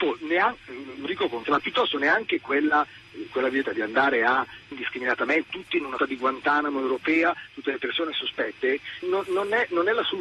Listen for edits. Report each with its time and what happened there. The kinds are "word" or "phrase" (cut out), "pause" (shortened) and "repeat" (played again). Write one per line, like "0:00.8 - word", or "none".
0:01.1 - word
0:01.4 - word
0:03.3 - word
0:03.6 - word
0:04.7 - word
0:05.5 - word
0:06.0 - word
0:09.0 - word